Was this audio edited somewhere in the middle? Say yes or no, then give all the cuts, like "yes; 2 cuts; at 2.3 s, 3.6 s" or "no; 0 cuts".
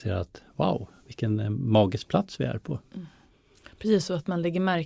no; 0 cuts